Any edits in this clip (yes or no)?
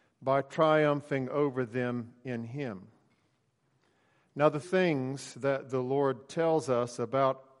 yes